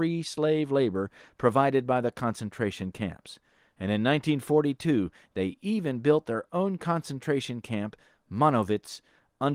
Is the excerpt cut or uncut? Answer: uncut